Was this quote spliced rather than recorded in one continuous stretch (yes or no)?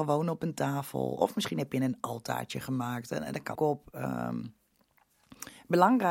yes